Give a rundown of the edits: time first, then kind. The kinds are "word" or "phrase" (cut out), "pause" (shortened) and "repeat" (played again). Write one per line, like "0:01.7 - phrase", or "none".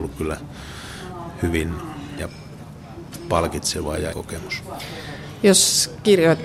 0:02.2 - word
0:04.1 - word